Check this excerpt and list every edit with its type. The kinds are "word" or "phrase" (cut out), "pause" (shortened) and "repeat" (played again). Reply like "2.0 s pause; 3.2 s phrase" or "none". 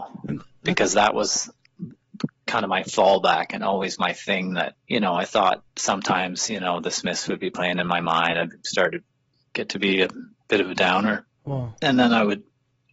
4.8 s pause; 5.7 s pause; 9.3 s pause; 11.4 s pause